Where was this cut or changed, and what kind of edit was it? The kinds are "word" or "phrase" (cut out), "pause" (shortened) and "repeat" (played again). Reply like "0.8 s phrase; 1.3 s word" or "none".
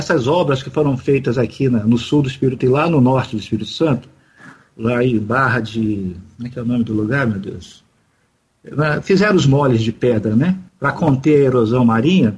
2.6 s word; 10.7 s pause